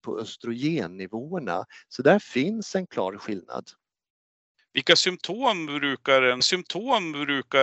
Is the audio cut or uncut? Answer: cut